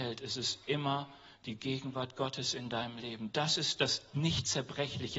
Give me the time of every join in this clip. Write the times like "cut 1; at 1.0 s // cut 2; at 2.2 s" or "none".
none